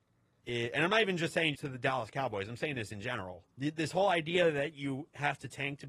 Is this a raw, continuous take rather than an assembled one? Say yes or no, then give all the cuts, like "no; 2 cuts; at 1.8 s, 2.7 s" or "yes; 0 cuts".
no; 2 cuts; at 1.5 s, 3.5 s